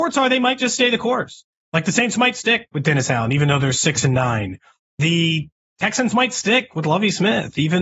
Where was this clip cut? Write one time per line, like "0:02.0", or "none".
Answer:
none